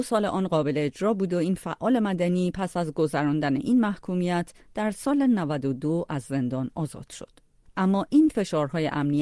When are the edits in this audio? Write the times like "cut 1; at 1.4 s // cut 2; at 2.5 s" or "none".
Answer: none